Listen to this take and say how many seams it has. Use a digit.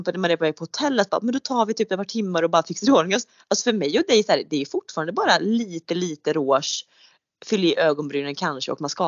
0